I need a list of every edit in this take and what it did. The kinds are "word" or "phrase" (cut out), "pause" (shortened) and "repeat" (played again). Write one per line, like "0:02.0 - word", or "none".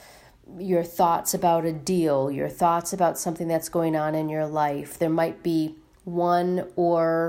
none